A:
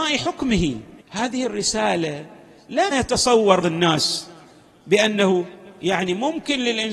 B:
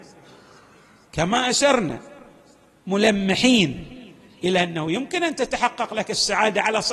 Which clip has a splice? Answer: A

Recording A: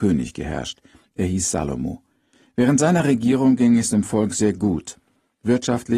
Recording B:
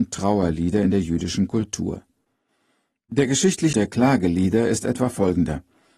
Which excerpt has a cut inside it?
B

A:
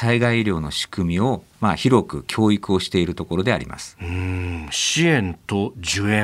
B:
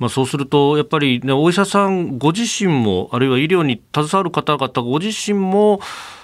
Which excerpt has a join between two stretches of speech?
A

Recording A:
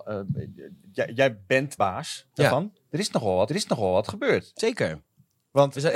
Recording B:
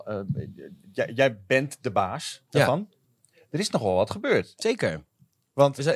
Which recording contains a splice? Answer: A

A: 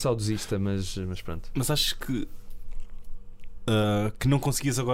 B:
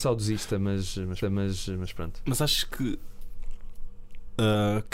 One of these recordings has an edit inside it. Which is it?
B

